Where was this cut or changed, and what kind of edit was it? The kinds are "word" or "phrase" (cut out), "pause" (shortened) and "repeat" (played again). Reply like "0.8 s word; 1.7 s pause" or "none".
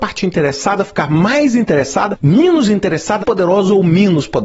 3.2 s word